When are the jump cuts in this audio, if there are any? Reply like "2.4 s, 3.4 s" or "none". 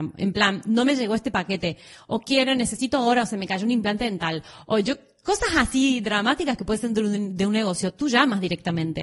none